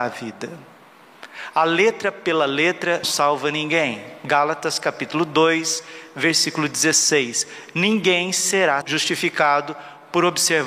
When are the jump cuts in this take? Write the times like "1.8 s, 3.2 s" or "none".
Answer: 3.0 s, 8.8 s

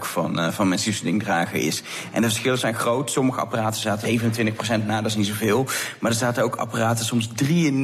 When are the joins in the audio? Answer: 4.0 s

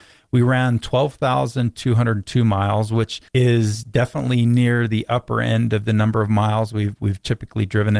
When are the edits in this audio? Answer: 3.3 s

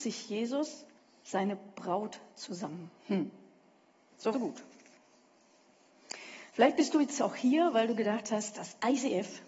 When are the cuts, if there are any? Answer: 1.0 s, 3.0 s, 4.3 s

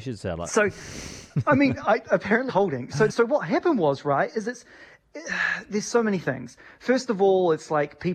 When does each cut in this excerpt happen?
2.5 s, 3.1 s

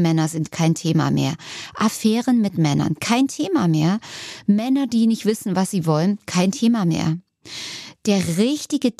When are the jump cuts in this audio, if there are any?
none

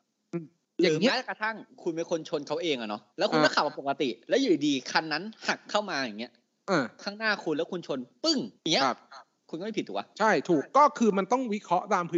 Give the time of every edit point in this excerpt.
3.1 s, 8.6 s, 10.1 s

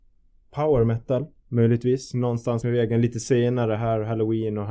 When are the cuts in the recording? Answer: 2.6 s

